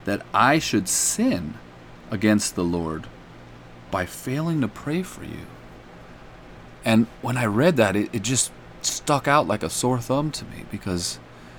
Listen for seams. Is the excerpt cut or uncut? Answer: uncut